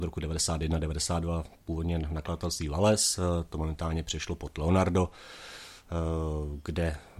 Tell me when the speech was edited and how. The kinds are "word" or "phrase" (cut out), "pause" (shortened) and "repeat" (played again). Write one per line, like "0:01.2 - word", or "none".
0:03.5 - word